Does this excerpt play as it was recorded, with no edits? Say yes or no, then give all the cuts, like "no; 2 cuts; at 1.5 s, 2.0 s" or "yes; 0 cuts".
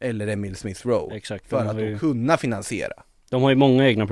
yes; 0 cuts